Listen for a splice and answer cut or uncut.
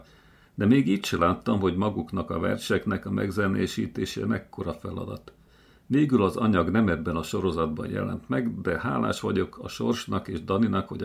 uncut